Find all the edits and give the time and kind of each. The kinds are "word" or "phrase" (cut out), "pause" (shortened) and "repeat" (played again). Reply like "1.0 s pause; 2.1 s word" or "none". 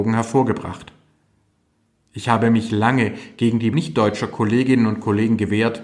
3.7 s word